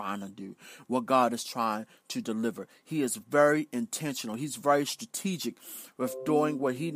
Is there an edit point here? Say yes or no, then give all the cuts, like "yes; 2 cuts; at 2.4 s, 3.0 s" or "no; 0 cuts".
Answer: no; 0 cuts